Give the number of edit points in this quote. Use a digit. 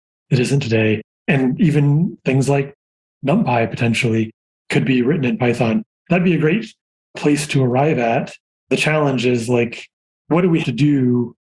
1